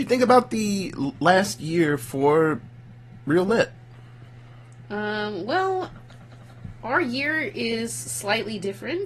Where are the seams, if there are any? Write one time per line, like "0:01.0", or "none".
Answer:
none